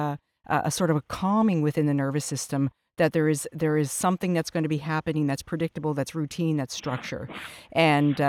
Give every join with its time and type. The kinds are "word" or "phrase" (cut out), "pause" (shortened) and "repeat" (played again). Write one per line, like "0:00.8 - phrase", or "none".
none